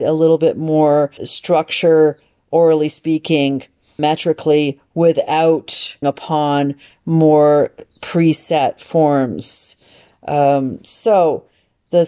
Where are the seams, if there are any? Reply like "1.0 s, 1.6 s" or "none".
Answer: 1.2 s, 4.0 s, 6.0 s